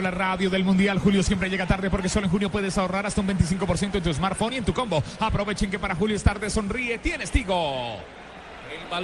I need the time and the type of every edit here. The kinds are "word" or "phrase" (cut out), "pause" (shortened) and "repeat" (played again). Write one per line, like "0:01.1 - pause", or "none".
none